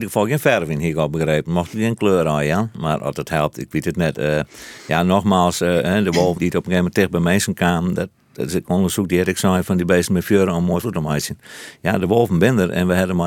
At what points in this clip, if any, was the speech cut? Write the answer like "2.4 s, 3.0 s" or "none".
6.4 s, 10.8 s